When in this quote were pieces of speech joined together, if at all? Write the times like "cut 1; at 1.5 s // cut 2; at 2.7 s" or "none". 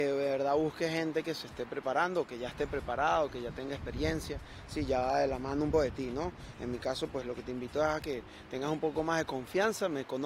cut 1; at 5.7 s